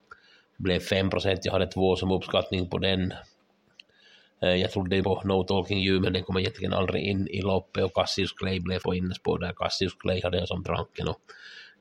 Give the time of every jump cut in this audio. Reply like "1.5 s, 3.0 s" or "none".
5.0 s, 8.8 s, 10.7 s